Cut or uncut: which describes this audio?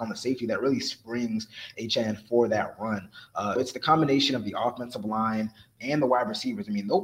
cut